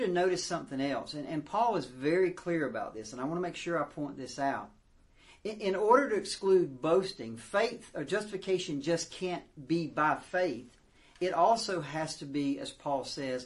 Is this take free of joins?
yes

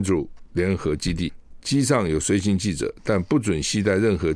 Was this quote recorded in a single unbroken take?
yes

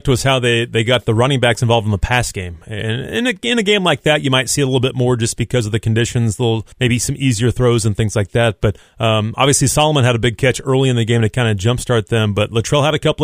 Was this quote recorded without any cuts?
no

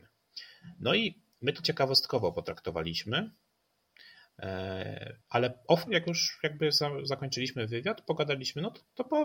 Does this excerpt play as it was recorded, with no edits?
no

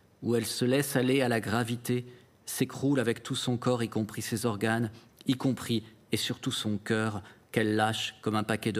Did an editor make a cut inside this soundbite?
no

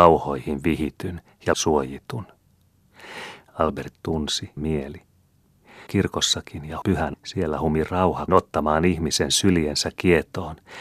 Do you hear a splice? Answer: yes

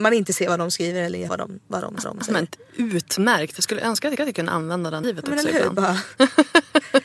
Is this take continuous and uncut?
no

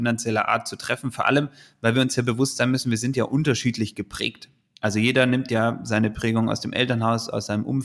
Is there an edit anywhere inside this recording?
no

